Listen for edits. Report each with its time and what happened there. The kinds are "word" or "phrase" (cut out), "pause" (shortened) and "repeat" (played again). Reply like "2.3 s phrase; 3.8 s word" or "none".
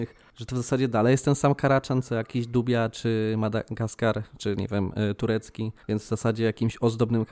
5.8 s pause